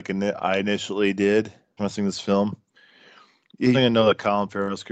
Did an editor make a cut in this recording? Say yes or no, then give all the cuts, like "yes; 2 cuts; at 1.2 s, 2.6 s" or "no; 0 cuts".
yes; 2 cuts; at 1.8 s, 3.7 s